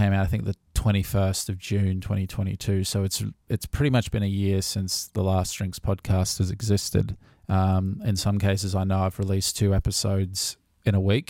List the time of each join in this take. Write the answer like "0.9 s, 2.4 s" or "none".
7.3 s